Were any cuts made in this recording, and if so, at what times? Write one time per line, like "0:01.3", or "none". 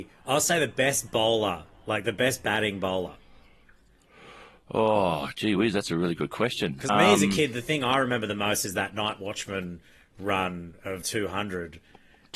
0:06.9
0:11.0